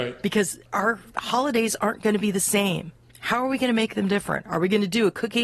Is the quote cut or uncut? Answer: uncut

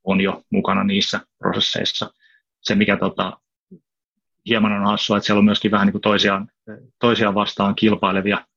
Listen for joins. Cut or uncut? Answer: uncut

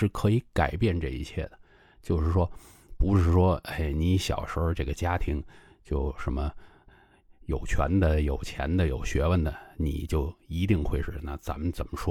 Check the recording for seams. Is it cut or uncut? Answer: uncut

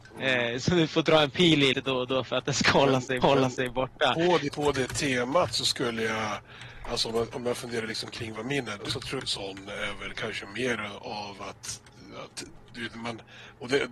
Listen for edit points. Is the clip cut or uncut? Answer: cut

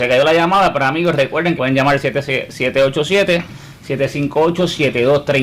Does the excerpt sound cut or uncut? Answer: cut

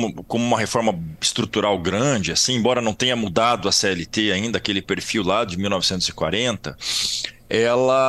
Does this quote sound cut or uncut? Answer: uncut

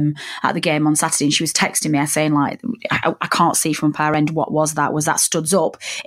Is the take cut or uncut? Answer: uncut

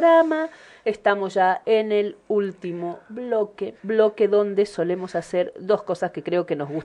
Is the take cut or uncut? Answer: cut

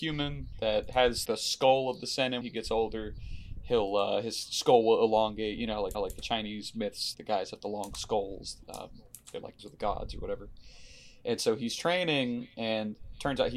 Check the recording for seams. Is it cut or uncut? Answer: cut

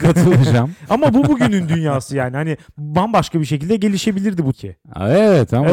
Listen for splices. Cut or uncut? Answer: cut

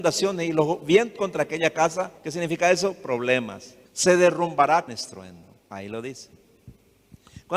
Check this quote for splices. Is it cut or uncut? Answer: cut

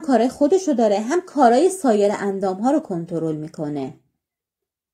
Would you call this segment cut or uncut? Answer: uncut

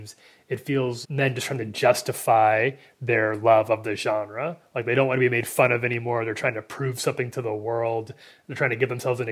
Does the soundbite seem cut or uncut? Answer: cut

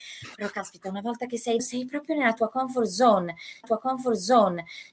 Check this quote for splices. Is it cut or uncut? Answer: cut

